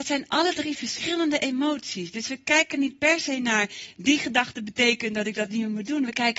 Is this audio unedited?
yes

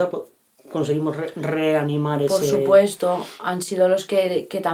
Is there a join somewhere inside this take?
no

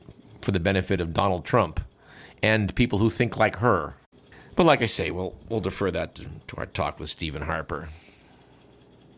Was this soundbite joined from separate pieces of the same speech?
no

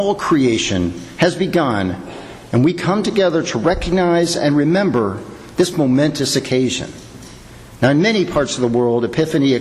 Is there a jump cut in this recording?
no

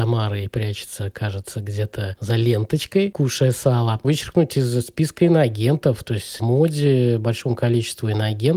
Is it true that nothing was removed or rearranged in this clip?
no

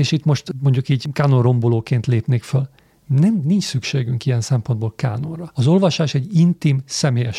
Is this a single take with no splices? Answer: yes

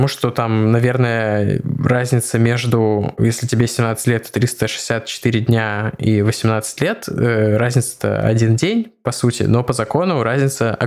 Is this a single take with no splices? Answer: yes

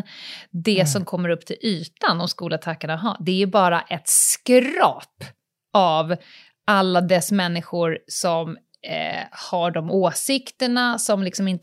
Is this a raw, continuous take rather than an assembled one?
yes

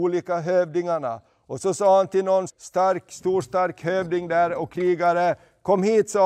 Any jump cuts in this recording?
yes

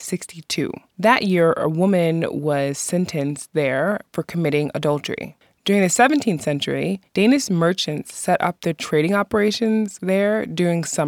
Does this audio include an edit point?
yes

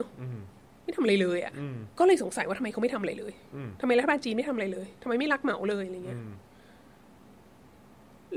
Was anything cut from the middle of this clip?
yes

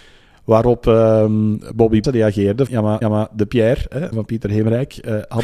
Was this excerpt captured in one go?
no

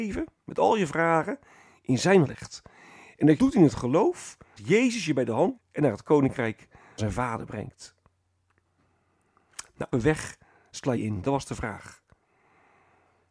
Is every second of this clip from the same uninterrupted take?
no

